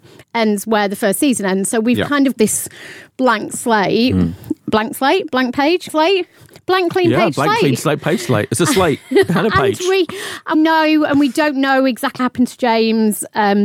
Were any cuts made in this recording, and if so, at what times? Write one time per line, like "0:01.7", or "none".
0:02.3
0:05.9
0:10.5
0:12.2